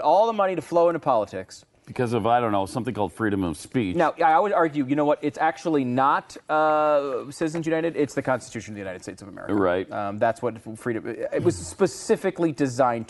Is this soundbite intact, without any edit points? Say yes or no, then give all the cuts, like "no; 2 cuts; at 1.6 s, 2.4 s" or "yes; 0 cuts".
yes; 0 cuts